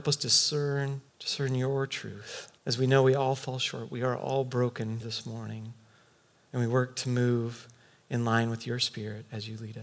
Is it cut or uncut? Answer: cut